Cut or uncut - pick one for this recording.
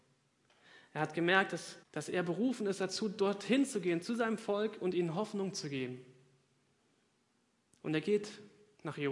cut